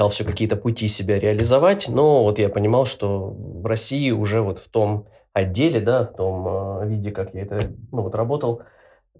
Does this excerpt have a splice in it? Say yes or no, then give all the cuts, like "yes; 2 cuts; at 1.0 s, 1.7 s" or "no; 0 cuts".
no; 0 cuts